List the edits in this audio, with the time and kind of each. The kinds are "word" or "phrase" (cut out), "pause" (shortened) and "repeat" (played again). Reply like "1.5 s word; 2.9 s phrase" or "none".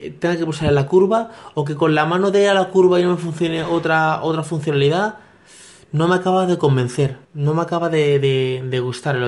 7.2 s pause